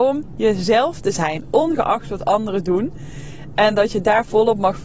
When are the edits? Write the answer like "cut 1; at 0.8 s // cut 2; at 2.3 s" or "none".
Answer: none

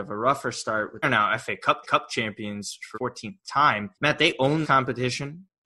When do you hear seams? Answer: cut 1; at 1.0 s // cut 2; at 1.8 s // cut 3; at 2.9 s // cut 4; at 3.9 s // cut 5; at 4.6 s

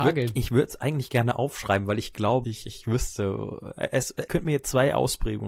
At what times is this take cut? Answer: cut 1; at 2.4 s // cut 2; at 4.3 s

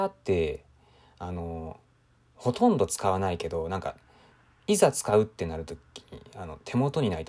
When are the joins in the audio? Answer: none

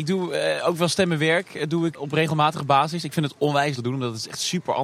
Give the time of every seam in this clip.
cut 1; at 1.9 s // cut 2; at 3.8 s

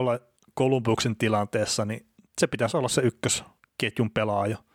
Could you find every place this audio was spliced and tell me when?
none

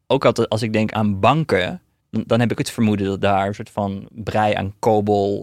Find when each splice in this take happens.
cut 1; at 0.9 s // cut 2; at 2.6 s

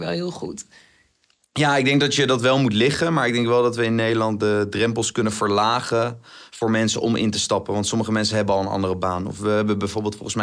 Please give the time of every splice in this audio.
none

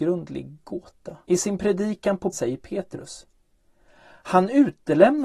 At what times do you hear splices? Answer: cut 1; at 1.2 s // cut 2; at 2.3 s

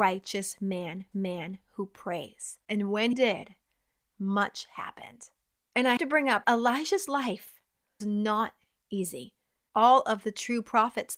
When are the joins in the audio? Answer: cut 1; at 1.1 s // cut 2; at 2.6 s // cut 3; at 3.1 s // cut 4; at 6.0 s // cut 5; at 6.4 s // cut 6; at 8.0 s

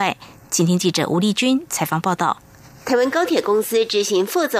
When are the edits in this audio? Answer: none

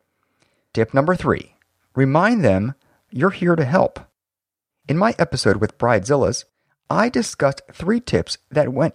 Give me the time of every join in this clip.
none

